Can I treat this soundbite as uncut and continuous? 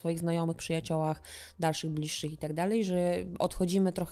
yes; 0 cuts

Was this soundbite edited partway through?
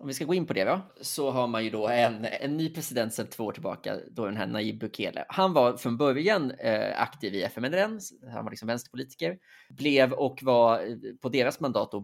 no; 0 cuts

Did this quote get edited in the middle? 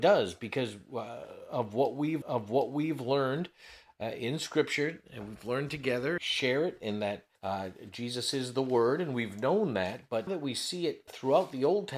yes; 5 cuts; at 2.2 s, 6.2 s, 7.3 s, 10.3 s, 11.1 s

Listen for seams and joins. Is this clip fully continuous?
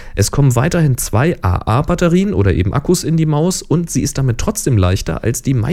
yes; 0 cuts

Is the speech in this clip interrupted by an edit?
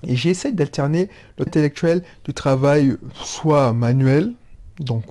yes; 1 cut; at 1.5 s

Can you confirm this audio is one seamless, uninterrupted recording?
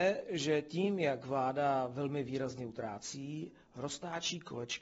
yes; 0 cuts

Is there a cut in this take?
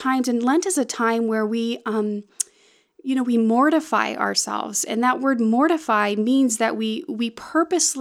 no; 0 cuts

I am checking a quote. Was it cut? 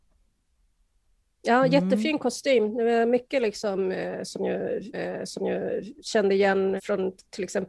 yes; 2 cuts; at 4.9 s, 6.8 s

